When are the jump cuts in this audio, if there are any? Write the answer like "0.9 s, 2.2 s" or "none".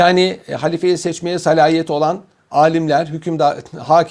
none